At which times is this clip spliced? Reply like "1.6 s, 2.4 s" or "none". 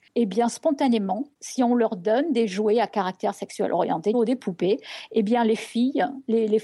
1.3 s, 4.1 s